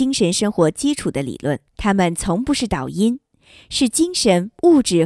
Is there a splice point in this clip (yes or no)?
yes